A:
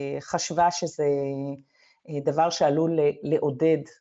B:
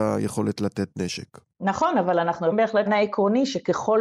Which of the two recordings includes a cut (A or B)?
B